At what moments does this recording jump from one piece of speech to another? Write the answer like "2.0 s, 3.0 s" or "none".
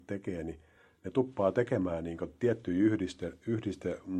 none